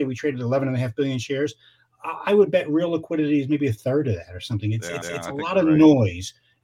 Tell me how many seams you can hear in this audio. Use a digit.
1